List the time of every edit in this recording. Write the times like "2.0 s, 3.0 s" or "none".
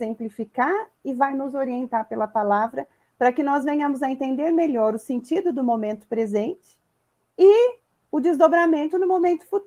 none